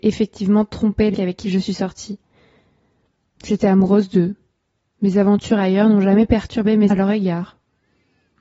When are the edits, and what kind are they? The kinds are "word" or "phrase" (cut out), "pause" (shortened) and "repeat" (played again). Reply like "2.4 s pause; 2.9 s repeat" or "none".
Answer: 1.1 s word; 6.9 s word